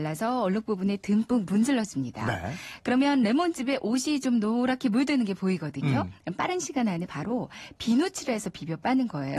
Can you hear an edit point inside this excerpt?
no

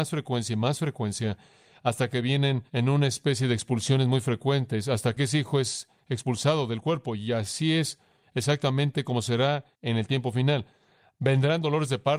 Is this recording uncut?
no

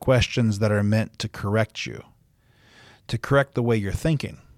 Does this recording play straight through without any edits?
yes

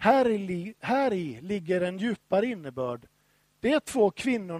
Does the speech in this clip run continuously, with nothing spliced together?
yes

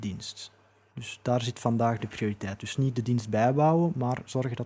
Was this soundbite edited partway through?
no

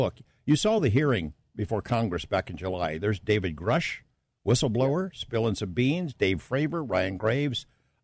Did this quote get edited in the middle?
no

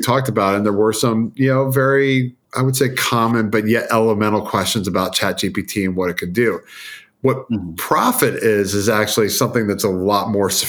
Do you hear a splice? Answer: yes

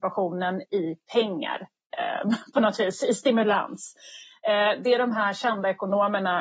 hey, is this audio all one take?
yes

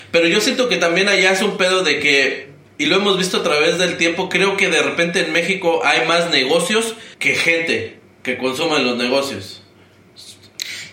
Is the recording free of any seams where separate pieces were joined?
no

